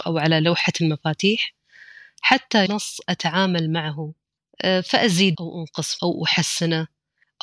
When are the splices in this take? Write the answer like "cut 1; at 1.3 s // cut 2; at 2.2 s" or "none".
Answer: cut 1; at 2.7 s // cut 2; at 5.3 s // cut 3; at 6.0 s